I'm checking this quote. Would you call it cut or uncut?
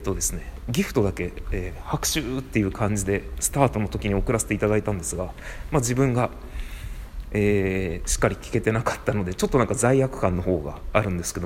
uncut